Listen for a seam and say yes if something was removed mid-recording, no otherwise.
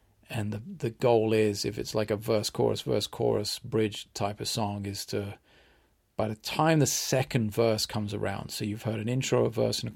no